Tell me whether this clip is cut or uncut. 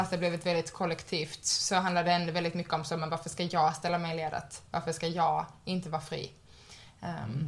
uncut